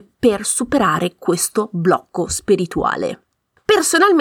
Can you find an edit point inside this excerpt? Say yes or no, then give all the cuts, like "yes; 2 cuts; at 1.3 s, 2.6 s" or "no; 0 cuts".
no; 0 cuts